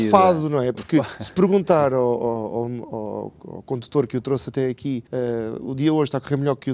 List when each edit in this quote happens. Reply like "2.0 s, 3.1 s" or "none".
5.1 s

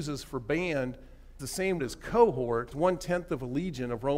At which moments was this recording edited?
1.4 s, 1.8 s, 2.7 s

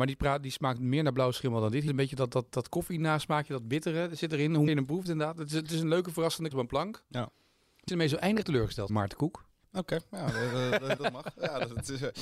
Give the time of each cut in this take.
1.9 s, 4.7 s, 6.5 s, 7.9 s, 8.4 s, 8.9 s, 11.0 s

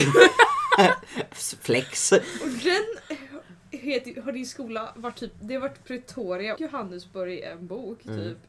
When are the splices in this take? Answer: 6.5 s

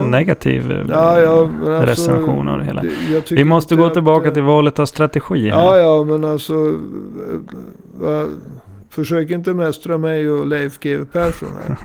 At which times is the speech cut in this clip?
8.8 s

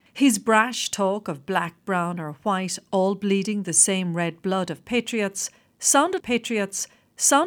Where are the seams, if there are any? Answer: 6.2 s

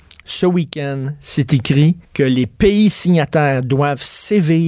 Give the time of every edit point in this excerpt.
2.0 s

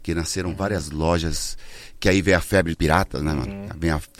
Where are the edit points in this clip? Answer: 2.7 s

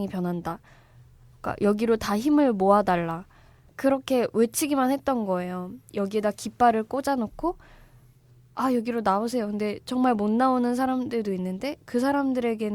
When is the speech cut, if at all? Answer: none

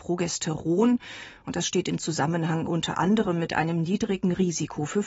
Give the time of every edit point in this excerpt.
none

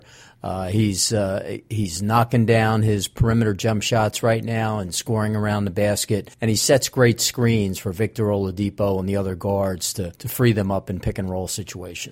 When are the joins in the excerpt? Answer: 6.3 s, 10.2 s

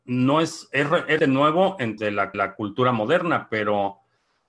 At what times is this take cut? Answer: 1.2 s, 2.0 s, 2.3 s

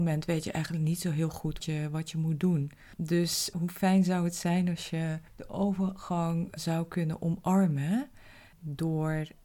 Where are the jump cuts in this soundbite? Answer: 1.6 s, 3.5 s, 6.6 s

